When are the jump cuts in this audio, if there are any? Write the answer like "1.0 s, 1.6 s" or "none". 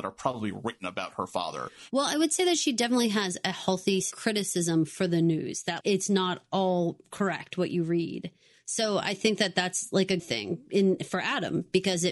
5.8 s, 10.2 s